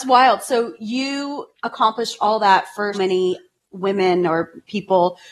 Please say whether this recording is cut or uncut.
cut